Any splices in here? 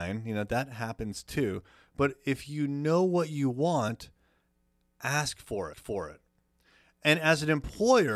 yes; 1 cut; at 5.7 s

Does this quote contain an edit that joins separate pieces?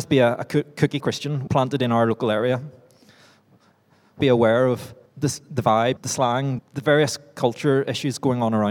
yes; 6 cuts; at 1.0 s, 1.5 s, 4.2 s, 5.1 s, 6.0 s, 6.6 s

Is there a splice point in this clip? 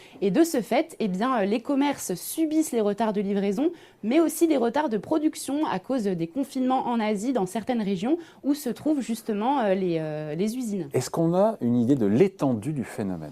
no; 0 cuts

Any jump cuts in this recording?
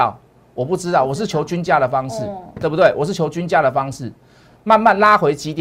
no; 0 cuts

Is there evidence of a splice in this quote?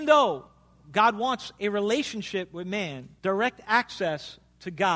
yes; 1 cut; at 3.2 s

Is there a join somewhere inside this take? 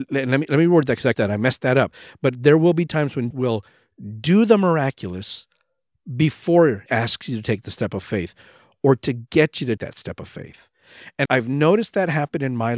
yes; 5 cuts; at 1.1 s, 3.3 s, 6.9 s, 9.8 s, 11.3 s

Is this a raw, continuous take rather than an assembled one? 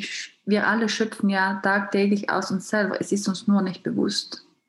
yes; 0 cuts

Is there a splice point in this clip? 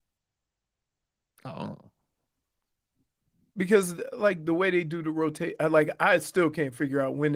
no; 0 cuts

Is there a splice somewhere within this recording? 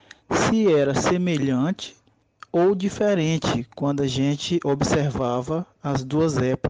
no; 0 cuts

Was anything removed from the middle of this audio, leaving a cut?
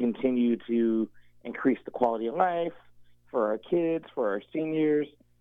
no; 0 cuts

